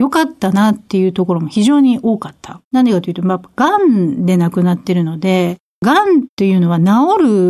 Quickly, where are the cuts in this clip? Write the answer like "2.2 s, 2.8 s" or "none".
2.7 s, 6.3 s